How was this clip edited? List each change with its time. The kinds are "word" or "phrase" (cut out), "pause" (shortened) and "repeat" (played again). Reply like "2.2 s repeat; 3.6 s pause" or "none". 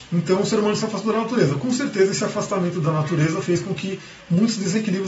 none